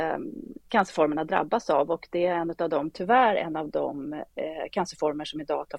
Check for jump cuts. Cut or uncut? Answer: uncut